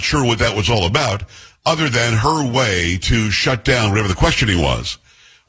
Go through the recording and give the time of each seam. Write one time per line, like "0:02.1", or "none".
none